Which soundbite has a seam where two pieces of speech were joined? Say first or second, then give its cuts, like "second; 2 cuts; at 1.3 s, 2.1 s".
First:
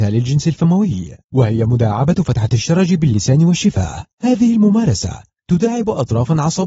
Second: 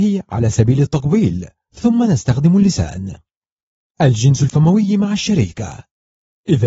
first; 2 cuts; at 1.2 s, 4.1 s